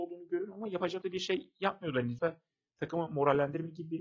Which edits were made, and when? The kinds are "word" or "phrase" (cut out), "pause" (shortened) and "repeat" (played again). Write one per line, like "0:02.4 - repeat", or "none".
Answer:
0:01.0 - word
0:02.2 - word